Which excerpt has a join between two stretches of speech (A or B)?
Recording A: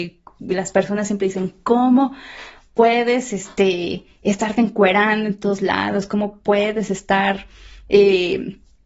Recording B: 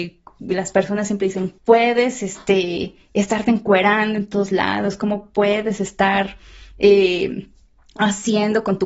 B